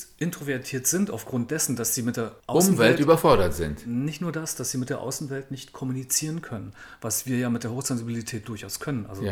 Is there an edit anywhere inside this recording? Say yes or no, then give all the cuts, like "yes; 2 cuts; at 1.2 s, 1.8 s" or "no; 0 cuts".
no; 0 cuts